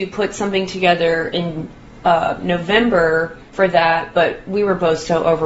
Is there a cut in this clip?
yes; 1 cut; at 3.5 s

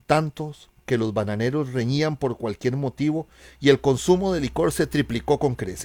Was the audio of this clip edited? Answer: no; 0 cuts

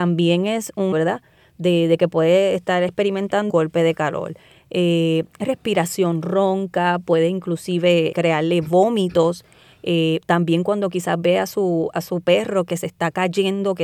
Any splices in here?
yes; 3 cuts; at 0.9 s, 3.5 s, 8.1 s

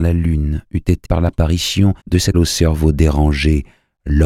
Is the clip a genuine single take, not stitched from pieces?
no; 3 cuts; at 1.0 s, 2.0 s, 2.3 s

